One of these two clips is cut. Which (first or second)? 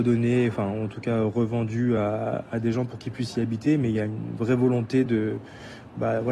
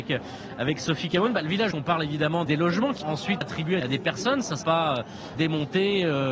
second